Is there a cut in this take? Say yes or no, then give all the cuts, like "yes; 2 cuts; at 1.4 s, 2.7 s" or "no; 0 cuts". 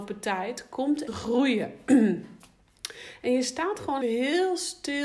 yes; 2 cuts; at 1.1 s, 4.0 s